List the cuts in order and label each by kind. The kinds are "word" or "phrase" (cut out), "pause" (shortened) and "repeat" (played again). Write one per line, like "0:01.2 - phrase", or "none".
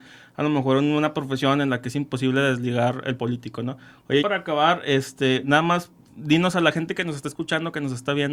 0:03.2 - word
0:04.2 - word